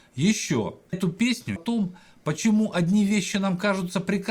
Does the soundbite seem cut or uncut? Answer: cut